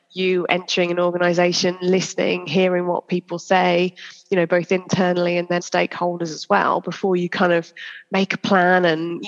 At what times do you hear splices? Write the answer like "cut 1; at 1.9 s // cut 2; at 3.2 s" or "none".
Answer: cut 1; at 5.6 s